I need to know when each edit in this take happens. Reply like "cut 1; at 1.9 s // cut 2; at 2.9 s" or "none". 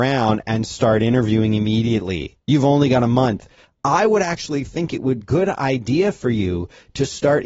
cut 1; at 2.4 s // cut 2; at 5.2 s